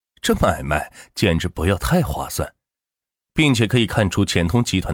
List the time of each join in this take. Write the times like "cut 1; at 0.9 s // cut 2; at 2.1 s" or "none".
none